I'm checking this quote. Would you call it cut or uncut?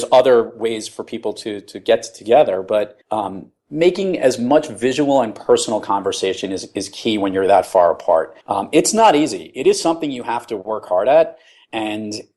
cut